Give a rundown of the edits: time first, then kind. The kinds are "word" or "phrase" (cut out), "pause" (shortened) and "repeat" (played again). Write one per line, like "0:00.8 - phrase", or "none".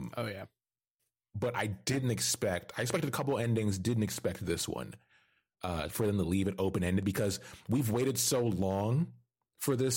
none